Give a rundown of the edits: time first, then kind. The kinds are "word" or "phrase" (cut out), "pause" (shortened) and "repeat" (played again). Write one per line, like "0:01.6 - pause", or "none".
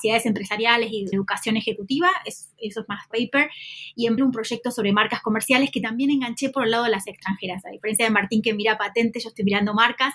0:01.1 - word
0:03.1 - word
0:04.2 - word
0:07.1 - word

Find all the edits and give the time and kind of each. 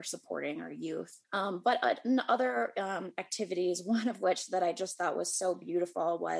0:01.2 - pause

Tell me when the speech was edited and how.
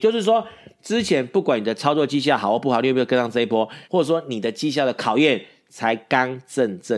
0:03.8 - pause

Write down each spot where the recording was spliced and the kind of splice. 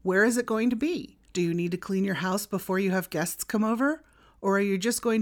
0:01.3 - pause

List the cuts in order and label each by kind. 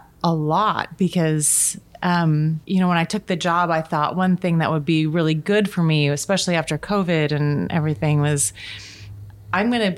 0:02.6 - pause

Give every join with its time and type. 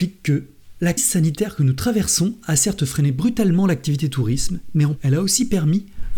0:01.0 - word
0:05.0 - word

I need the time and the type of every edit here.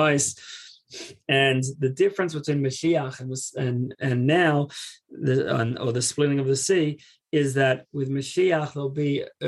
none

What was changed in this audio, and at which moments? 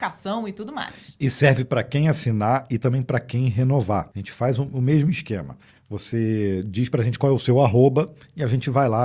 none

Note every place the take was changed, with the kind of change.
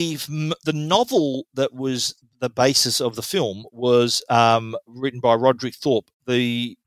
none

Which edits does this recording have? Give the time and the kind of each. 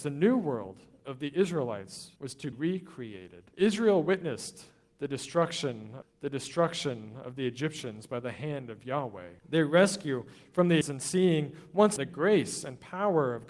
0:02.2 - pause
0:02.5 - word
0:03.5 - pause
0:06.0 - repeat
0:09.4 - pause
0:10.8 - word
0:12.0 - word

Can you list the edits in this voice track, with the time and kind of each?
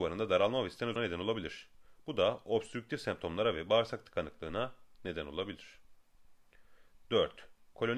0:01.0 - word

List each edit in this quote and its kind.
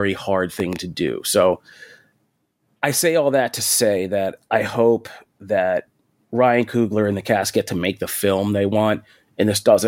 none

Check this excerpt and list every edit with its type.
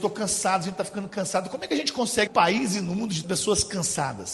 0:02.3 - phrase
0:03.2 - word

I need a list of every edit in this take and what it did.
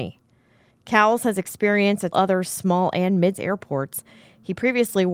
0:02.1 - word
0:03.3 - word

